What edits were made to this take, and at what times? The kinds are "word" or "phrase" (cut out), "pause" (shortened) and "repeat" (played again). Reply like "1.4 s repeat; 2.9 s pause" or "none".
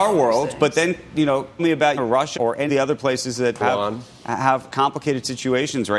1.6 s word; 2.0 s word; 2.4 s word; 2.7 s word; 3.6 s word; 4.7 s word